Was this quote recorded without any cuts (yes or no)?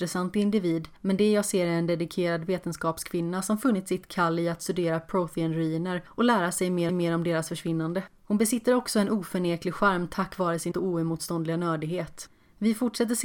no